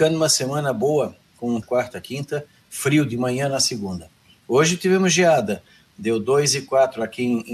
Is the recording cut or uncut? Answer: cut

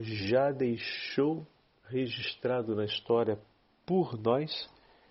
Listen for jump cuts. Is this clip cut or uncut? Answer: uncut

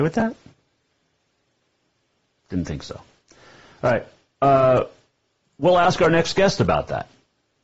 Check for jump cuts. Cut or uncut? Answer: uncut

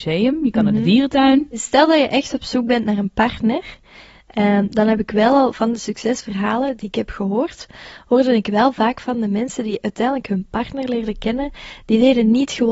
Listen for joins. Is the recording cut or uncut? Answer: uncut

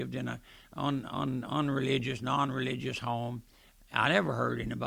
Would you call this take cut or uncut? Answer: uncut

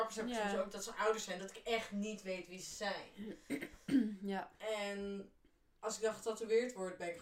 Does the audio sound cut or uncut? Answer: uncut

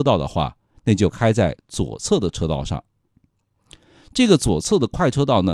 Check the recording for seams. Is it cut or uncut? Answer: uncut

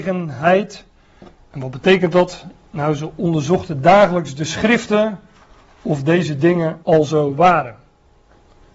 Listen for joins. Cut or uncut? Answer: cut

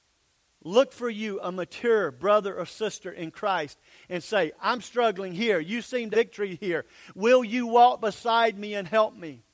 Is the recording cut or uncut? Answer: cut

